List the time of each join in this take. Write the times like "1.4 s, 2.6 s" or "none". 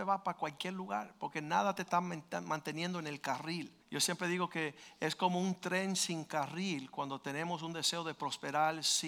3.8 s